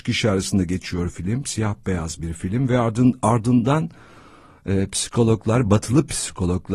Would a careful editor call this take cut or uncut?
uncut